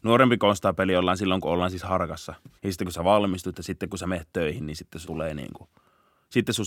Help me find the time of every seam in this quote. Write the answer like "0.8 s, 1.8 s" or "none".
2.6 s, 5.0 s